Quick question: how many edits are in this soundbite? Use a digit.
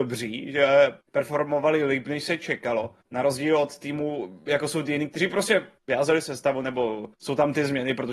4